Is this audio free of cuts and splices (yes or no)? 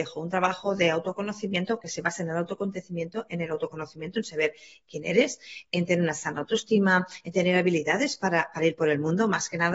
yes